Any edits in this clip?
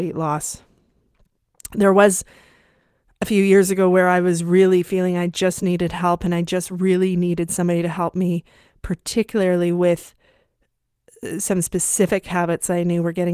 no; 0 cuts

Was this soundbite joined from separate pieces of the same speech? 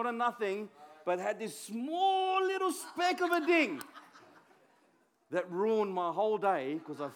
no; 0 cuts

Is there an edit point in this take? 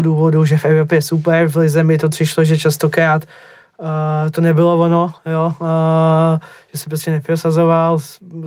no; 0 cuts

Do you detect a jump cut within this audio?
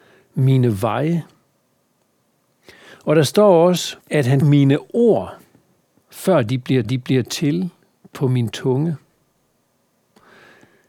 yes; 3 cuts; at 4.0 s, 4.4 s, 6.8 s

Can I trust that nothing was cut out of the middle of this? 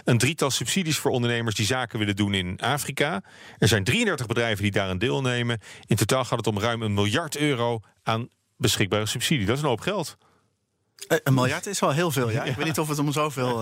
yes; 0 cuts

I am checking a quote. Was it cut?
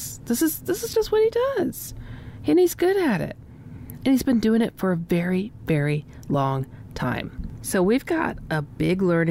no; 0 cuts

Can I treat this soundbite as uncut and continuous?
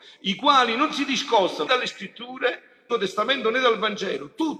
no; 2 cuts; at 1.7 s, 2.9 s

